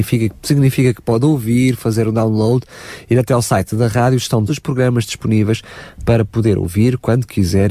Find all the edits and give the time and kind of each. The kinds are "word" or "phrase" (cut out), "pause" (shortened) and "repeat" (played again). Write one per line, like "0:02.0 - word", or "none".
0:04.5 - word